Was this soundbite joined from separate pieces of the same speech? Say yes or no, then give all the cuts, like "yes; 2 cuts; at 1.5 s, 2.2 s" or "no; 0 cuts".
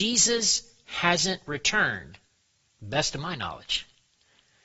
no; 0 cuts